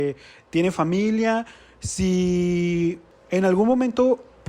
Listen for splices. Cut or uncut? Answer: uncut